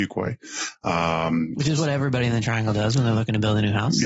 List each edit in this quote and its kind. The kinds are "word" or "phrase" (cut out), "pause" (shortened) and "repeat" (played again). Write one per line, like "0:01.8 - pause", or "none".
none